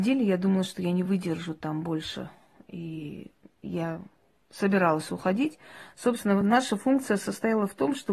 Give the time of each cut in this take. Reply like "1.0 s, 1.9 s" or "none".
none